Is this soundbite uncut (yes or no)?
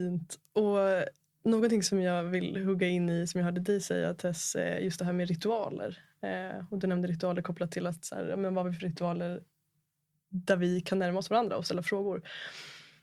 yes